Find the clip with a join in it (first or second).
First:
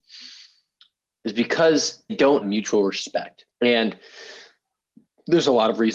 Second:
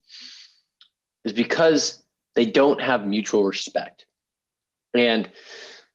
first